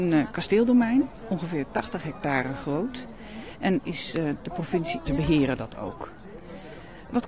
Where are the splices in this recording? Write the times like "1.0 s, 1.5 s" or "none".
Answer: 3.8 s, 5.1 s